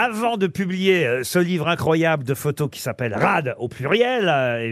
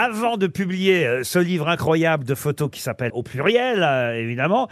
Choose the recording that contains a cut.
second; 1 cut; at 3.1 s

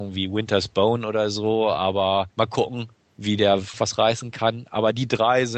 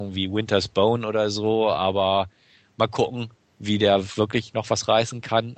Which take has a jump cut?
first; 2 cuts; at 2.3 s, 3.7 s

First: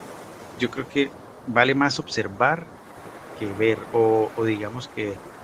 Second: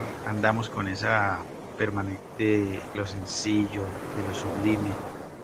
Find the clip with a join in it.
second; 1 cut; at 2.9 s

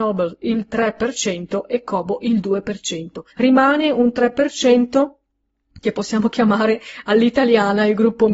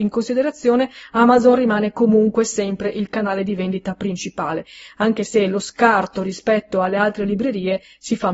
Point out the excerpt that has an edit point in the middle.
first; 1 cut; at 3.3 s

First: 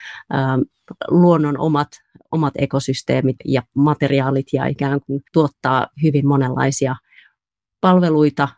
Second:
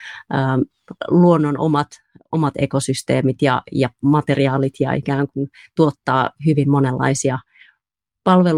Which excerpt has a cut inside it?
first; 2 cuts; at 3.4 s, 5.3 s

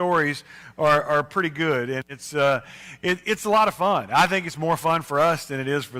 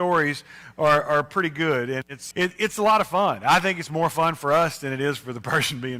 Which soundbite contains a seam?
second; 1 cut; at 2.3 s

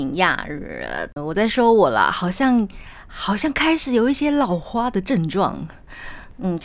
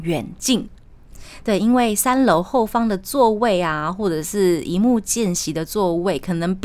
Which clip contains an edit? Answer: first; 1 cut; at 1.2 s

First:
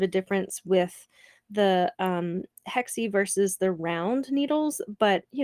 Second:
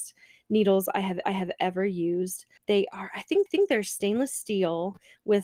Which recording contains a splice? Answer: second; 3 cuts; at 1.2 s, 2.6 s, 3.5 s

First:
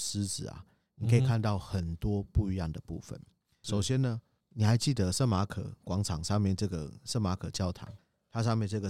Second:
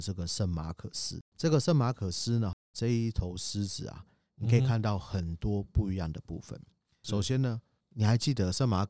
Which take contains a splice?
second; 1 cut; at 1.3 s

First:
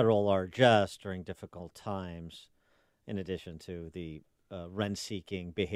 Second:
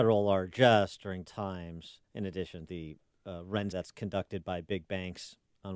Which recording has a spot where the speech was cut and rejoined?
second; 4 cuts; at 1.2 s, 2.0 s, 2.7 s, 3.7 s

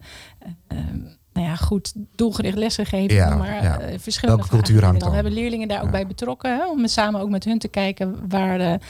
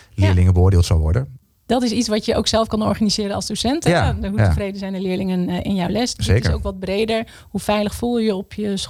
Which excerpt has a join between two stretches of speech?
first; 2 cuts; at 2.1 s, 5.0 s

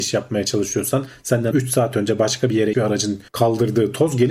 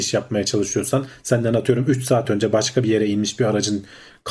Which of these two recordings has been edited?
first; 3 cuts; at 1.5 s, 2.7 s, 3.3 s

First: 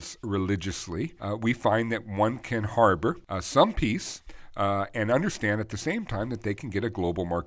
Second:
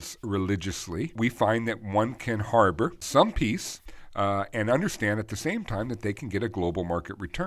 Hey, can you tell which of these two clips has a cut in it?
second; 2 cuts; at 1.2 s, 3.0 s

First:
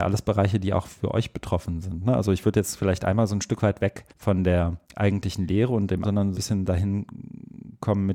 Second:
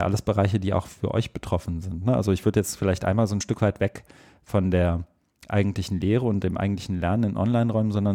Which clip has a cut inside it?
first; 4 cuts; at 4.1 s, 4.8 s, 6.0 s, 6.3 s

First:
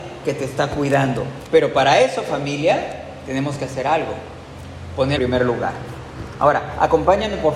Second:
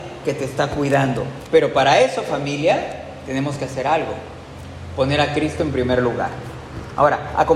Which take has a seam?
first; 1 cut; at 5.2 s

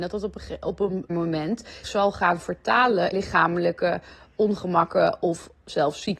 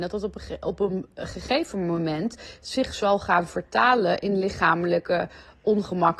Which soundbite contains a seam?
first; 3 cuts; at 1.1 s, 1.8 s, 3.1 s

